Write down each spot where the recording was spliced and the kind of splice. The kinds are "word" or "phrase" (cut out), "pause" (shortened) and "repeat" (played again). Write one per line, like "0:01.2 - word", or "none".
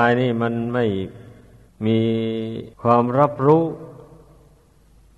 0:01.7 - pause
0:02.7 - pause